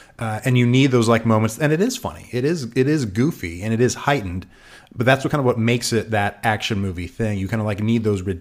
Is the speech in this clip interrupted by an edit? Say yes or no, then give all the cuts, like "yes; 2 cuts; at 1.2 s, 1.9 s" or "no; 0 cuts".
no; 0 cuts